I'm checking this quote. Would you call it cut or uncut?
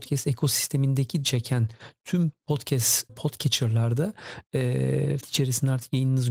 cut